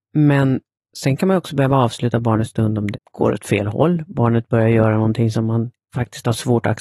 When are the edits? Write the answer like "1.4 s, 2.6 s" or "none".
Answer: 2.9 s